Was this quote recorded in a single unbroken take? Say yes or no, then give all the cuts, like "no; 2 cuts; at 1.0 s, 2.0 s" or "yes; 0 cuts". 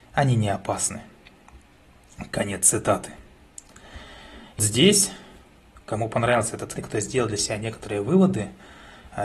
no; 2 cuts; at 4.6 s, 6.8 s